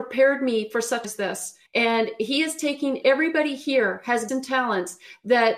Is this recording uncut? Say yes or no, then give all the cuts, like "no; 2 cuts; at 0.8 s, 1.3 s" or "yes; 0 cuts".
no; 4 cuts; at 1.0 s, 1.7 s, 3.0 s, 4.3 s